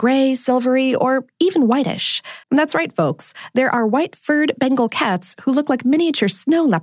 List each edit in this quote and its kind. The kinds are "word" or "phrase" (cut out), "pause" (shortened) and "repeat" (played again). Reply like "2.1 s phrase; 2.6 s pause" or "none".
2.4 s pause